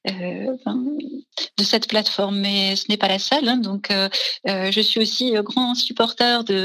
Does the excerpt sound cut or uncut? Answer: uncut